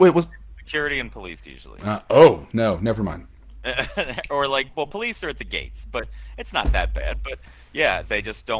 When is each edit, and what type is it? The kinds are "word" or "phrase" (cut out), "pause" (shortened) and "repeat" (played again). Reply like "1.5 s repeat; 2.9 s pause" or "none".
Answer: none